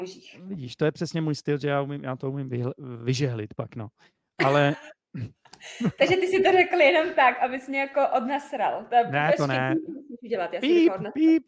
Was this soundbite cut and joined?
no; 0 cuts

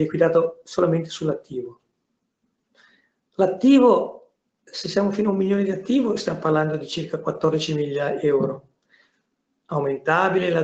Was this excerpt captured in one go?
yes; 0 cuts

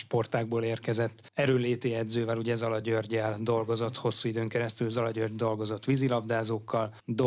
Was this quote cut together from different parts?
no; 0 cuts

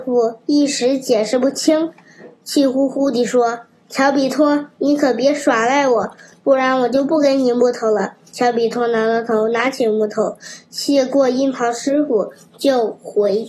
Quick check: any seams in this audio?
no; 0 cuts

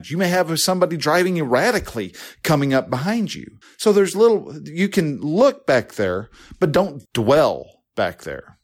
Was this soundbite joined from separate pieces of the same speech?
yes; 2 cuts; at 3.6 s, 7.1 s

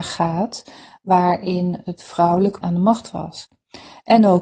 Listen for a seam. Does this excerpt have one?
yes; 1 cut; at 2.6 s

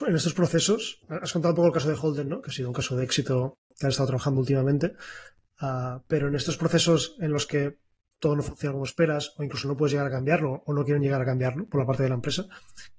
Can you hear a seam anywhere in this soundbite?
yes; 1 cut; at 1.0 s

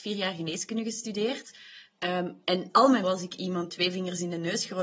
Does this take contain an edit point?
yes; 3 cuts; at 2.7 s, 3.0 s, 3.7 s

